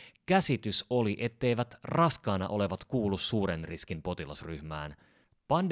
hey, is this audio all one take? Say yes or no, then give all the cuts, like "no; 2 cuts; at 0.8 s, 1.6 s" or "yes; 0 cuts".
yes; 0 cuts